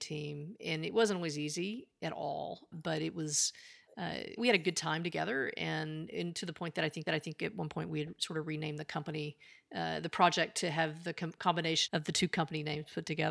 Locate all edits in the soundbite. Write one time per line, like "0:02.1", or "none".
0:02.7
0:04.4
0:07.1
0:11.9